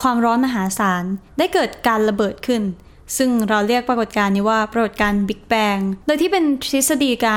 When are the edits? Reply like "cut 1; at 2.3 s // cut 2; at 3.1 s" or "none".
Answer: cut 1; at 1.3 s // cut 2; at 6.0 s